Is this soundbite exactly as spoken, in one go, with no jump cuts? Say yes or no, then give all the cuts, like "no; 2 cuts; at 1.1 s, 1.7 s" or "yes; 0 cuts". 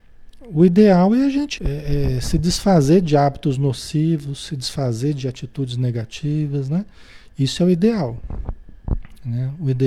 no; 1 cut; at 1.6 s